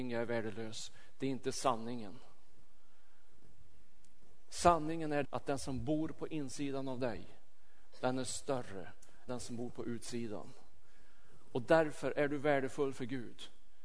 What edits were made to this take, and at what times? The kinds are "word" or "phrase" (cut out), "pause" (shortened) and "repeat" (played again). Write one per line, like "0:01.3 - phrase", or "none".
0:05.2 - word
0:09.3 - word

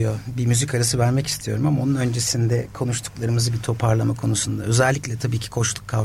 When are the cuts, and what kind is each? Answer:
none

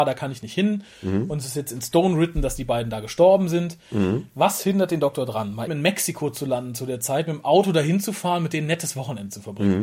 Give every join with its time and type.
0:05.7 - word

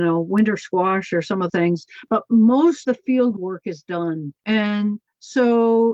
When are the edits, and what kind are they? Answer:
0:01.5 - word
0:02.8 - word
0:04.4 - pause

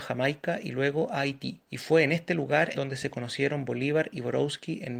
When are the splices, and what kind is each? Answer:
0:01.6 - pause
0:02.7 - word

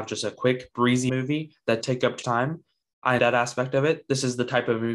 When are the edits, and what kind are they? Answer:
0:01.1 - word
0:01.8 - word
0:02.2 - word
0:03.2 - word

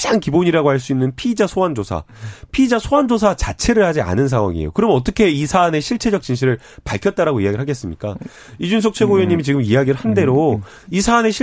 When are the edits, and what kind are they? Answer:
none

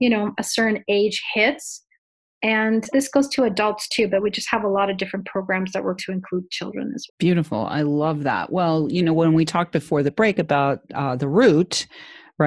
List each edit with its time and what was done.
0:02.9 - word
0:06.0 - word
0:07.1 - word

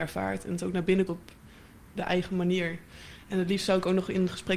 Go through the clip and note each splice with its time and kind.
0:01.1 - word

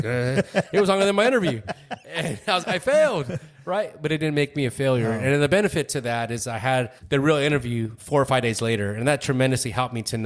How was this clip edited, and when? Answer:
0:02.6 - word
0:07.0 - pause
0:08.0 - word

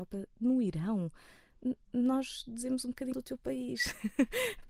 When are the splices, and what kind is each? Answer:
0:01.8 - pause
0:03.1 - word

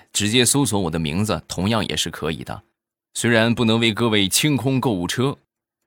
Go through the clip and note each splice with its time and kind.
none

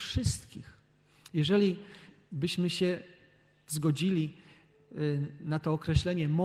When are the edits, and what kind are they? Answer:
none

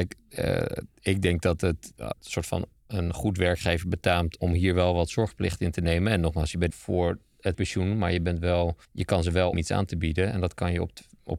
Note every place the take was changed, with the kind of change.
0:00.9 - pause
0:02.1 - word
0:04.4 - word
0:06.7 - phrase
0:07.5 - word
0:08.8 - pause
0:09.5 - phrase

